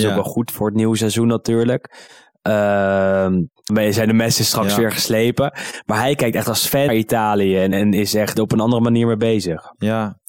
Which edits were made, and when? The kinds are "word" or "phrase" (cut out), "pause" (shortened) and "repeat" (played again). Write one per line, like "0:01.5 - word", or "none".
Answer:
0:03.7 - word
0:06.9 - word
0:07.7 - word
0:08.4 - word